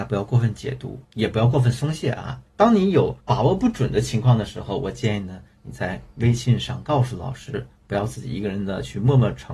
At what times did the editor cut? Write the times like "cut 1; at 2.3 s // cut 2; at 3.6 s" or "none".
cut 1; at 1.0 s // cut 2; at 2.5 s // cut 3; at 3.2 s // cut 4; at 7.8 s